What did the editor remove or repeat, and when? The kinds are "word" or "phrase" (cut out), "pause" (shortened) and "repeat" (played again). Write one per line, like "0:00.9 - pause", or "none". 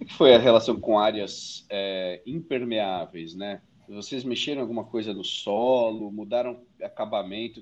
0:03.6 - pause